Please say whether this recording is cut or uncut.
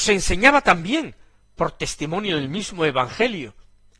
uncut